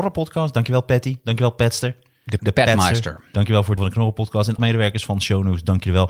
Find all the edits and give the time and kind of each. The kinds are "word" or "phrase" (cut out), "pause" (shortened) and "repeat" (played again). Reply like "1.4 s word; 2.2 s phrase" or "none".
2.4 s word; 3.8 s word; 4.6 s phrase